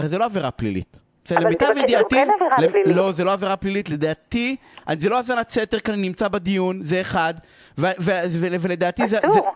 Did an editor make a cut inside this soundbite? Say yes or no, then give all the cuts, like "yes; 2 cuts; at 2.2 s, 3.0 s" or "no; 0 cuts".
no; 0 cuts